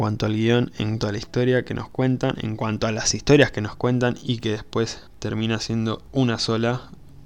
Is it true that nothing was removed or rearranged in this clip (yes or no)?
no